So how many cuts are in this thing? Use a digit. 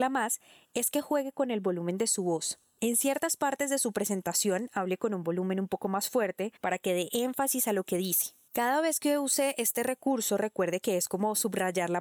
1